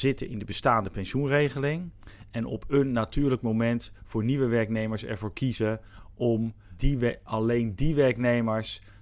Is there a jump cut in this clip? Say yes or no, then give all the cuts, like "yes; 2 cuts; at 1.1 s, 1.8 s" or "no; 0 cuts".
no; 0 cuts